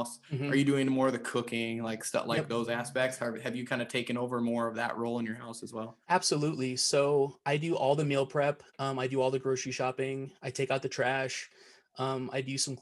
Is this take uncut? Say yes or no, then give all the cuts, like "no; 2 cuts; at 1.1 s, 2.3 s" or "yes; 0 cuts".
no; 2 cuts; at 6.0 s, 8.7 s